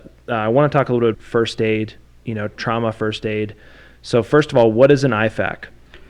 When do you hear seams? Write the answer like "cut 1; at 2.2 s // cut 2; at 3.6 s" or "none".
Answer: cut 1; at 1.1 s // cut 2; at 2.6 s